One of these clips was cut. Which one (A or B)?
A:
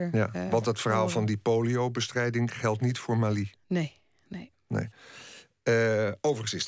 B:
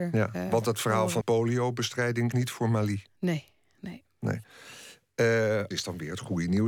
B